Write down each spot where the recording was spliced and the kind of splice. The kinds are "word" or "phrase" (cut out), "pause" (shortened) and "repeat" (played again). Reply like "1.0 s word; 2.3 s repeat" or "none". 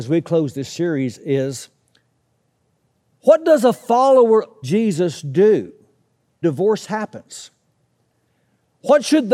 4.6 s word; 6.4 s word